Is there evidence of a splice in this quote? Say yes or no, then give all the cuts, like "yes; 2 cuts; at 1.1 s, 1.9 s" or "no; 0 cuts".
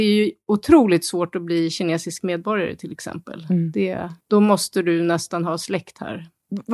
yes; 1 cut; at 4.2 s